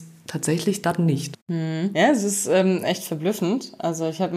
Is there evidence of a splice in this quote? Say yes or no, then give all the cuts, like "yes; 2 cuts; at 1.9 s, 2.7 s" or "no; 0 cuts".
yes; 1 cut; at 1.4 s